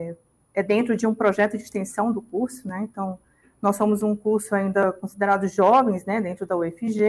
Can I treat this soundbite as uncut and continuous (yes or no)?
yes